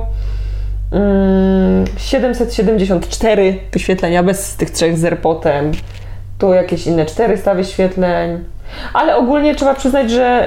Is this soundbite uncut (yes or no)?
yes